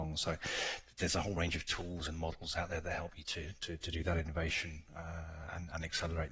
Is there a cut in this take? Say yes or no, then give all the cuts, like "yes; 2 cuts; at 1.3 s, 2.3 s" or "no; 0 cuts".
no; 0 cuts